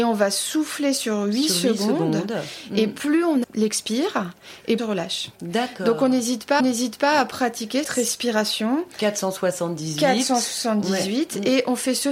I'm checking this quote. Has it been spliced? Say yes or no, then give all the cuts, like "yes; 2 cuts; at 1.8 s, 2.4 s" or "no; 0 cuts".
yes; 5 cuts; at 3.4 s, 4.8 s, 5.4 s, 6.6 s, 7.8 s